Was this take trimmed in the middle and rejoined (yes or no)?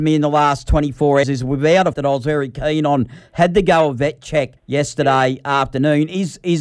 yes